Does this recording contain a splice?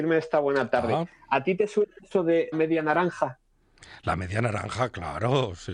yes; 1 cut; at 2.5 s

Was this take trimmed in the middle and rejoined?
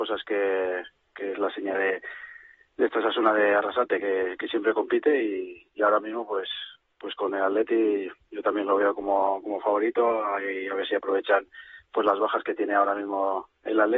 no; 0 cuts

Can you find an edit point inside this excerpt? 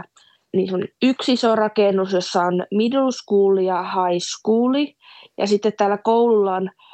no; 0 cuts

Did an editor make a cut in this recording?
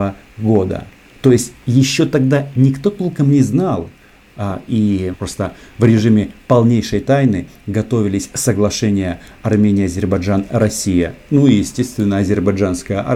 yes; 1 cut; at 5.1 s

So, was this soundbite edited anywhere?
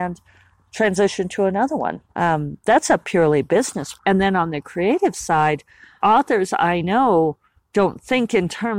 yes; 3 cuts; at 2.1 s, 4.0 s, 6.0 s

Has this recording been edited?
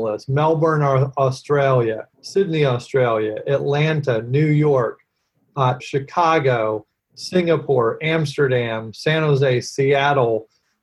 yes; 2 cuts; at 2.1 s, 5.8 s

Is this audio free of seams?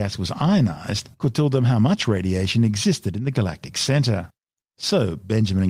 yes; 0 cuts

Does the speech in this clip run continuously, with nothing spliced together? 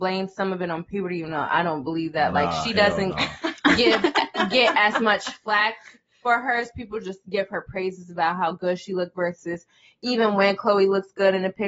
yes; 0 cuts

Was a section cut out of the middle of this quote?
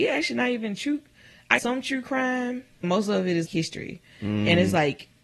yes; 3 cuts; at 1.6 s, 2.8 s, 3.5 s

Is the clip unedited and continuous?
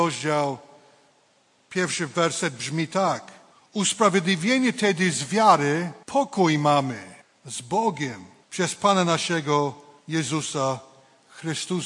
no; 5 cuts; at 3.5 s, 6.0 s, 7.2 s, 8.4 s, 10.0 s

